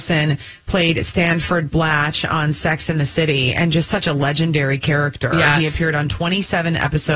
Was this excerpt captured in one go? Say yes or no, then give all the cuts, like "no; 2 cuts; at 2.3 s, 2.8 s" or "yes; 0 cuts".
yes; 0 cuts